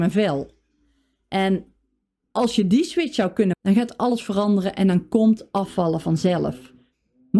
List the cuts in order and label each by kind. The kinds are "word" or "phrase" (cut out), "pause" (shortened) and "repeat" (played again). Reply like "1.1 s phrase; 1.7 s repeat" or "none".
3.5 s word